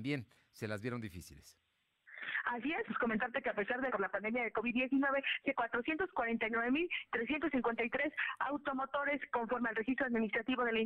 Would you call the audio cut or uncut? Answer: cut